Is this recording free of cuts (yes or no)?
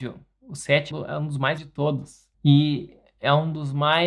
no